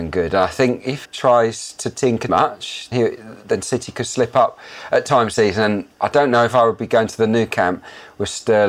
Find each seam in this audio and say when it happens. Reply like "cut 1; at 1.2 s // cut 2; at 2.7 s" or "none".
cut 1; at 1.0 s // cut 2; at 2.3 s // cut 3; at 2.9 s // cut 4; at 5.3 s